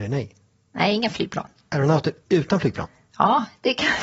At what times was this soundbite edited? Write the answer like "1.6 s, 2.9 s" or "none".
none